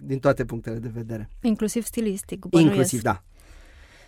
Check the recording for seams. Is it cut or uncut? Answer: cut